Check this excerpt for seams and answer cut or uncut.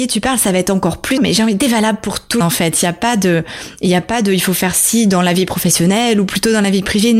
cut